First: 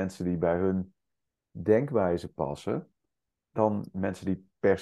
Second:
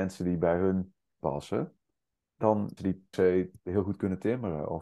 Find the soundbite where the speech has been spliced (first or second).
second